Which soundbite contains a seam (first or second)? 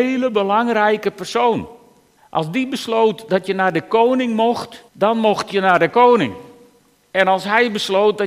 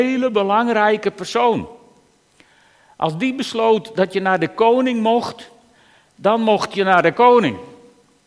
first